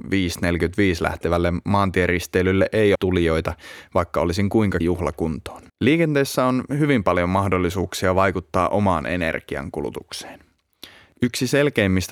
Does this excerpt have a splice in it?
yes; 3 cuts; at 3.0 s, 4.8 s, 5.7 s

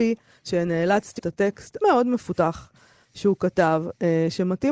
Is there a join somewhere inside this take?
yes; 2 cuts; at 1.2 s, 1.8 s

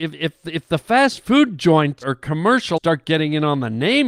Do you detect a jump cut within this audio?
yes; 2 cuts; at 2.0 s, 2.8 s

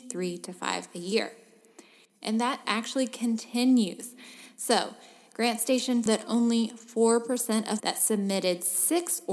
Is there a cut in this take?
yes; 3 cuts; at 2.6 s, 6.1 s, 7.8 s

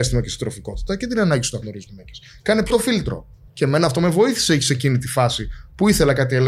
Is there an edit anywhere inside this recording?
yes; 3 cuts; at 1.9 s, 2.7 s, 3.5 s

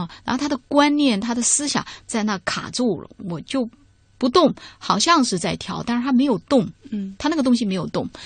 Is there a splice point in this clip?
no; 0 cuts

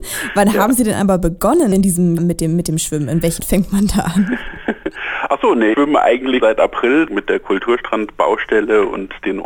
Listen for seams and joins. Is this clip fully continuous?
no; 5 cuts; at 2.2 s, 3.4 s, 5.7 s, 6.4 s, 7.1 s

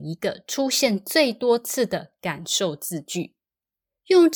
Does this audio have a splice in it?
no; 0 cuts

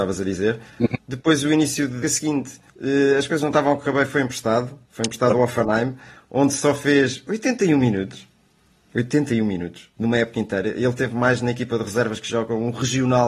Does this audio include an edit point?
yes; 3 cuts; at 2.0 s, 2.7 s, 4.8 s

